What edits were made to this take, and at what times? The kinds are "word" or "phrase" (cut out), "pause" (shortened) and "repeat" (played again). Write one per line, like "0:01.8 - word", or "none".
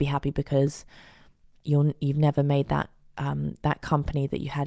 none